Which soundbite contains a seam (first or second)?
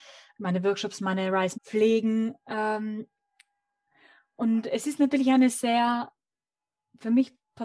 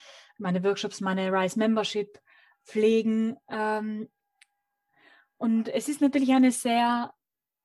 first